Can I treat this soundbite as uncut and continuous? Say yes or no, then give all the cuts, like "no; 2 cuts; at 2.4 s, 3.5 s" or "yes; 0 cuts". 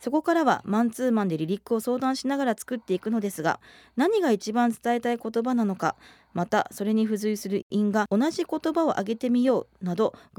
yes; 0 cuts